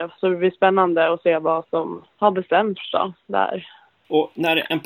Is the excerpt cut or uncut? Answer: cut